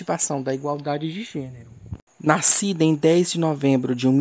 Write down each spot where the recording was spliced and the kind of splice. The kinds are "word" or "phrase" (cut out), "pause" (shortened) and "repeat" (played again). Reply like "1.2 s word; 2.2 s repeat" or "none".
2.1 s pause